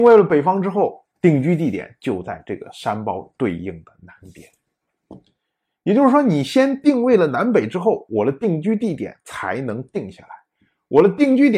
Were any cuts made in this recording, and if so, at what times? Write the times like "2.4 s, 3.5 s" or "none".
1.1 s